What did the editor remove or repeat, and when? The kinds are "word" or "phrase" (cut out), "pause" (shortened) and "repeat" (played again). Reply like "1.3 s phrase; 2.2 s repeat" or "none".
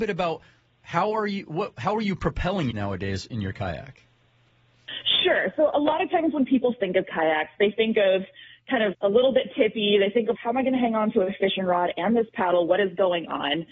2.7 s word; 8.9 s word; 10.3 s word

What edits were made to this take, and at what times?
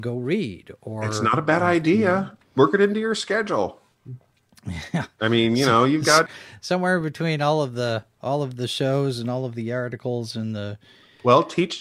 6.3 s word

